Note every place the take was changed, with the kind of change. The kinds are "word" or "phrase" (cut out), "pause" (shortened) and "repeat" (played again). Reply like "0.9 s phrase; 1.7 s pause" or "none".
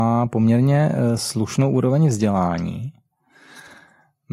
none